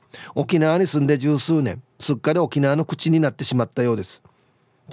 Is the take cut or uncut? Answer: cut